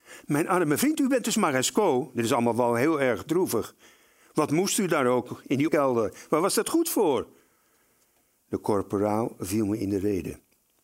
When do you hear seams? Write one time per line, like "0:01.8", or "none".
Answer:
0:05.7

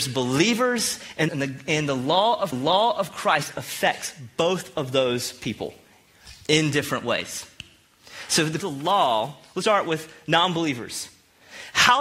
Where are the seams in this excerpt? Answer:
0:01.3
0:02.5
0:08.6
0:09.6

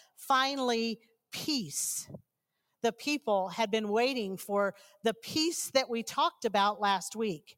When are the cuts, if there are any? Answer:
none

